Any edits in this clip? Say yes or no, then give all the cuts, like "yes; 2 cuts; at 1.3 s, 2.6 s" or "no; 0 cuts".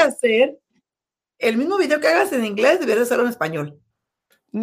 no; 0 cuts